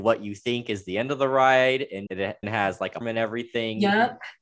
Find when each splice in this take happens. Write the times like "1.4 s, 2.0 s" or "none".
2.1 s, 2.4 s, 3.0 s